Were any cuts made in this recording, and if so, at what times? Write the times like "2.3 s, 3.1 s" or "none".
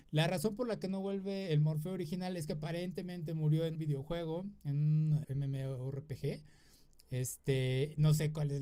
3.8 s, 5.2 s